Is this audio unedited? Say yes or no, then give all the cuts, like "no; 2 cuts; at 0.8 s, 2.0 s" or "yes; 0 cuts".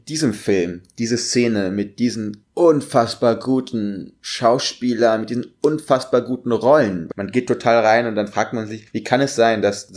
no; 1 cut; at 8.9 s